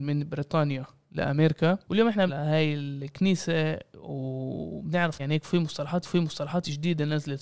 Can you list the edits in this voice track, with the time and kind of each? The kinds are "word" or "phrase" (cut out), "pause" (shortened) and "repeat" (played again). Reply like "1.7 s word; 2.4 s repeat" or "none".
1.8 s pause; 2.3 s word; 5.2 s word; 6.0 s repeat

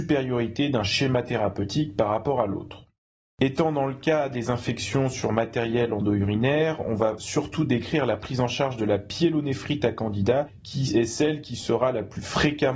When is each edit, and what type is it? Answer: none

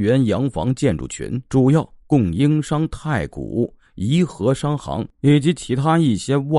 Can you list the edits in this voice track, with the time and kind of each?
1.5 s pause; 5.1 s pause

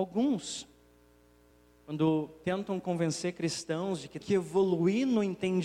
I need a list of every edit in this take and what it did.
4.2 s word

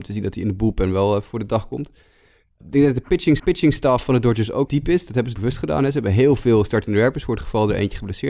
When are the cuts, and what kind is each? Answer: 2.6 s word; 3.4 s repeat; 4.7 s word; 5.4 s word

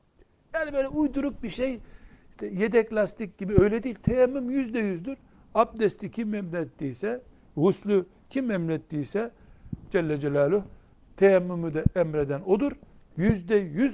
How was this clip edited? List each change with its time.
none

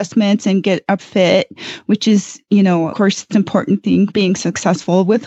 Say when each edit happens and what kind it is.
1.0 s word; 2.9 s word; 3.3 s word; 4.1 s word

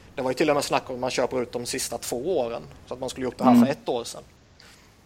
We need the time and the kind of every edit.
none

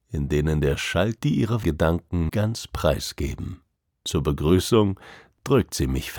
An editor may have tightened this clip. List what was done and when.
1.2 s phrase; 1.6 s word; 2.3 s word; 3.8 s pause

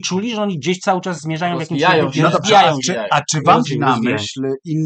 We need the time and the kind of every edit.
3.6 s word

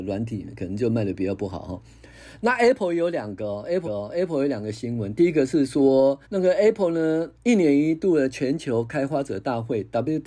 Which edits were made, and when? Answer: 3.8 s repeat; 6.2 s pause; 7.4 s pause

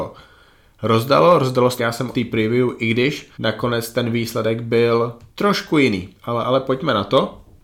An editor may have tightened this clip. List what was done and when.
1.8 s phrase; 2.1 s word; 3.3 s pause; 5.3 s pause; 6.2 s pause

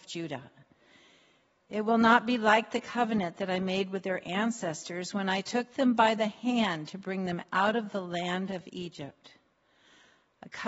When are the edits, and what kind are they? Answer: none

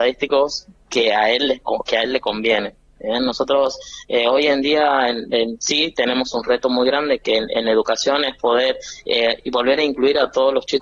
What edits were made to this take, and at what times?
none

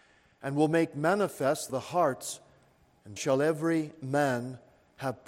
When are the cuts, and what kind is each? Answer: 1.7 s phrase; 3.2 s word

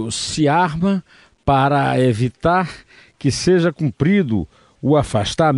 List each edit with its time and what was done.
none

